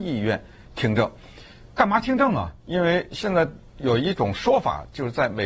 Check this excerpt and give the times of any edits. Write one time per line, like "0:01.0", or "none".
0:02.6